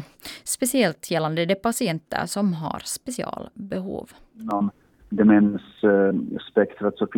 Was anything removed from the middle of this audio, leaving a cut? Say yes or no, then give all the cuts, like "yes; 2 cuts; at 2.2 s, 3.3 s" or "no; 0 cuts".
no; 0 cuts